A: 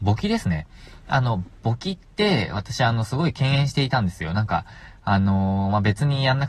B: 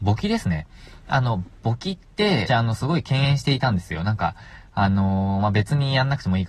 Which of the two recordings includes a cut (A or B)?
B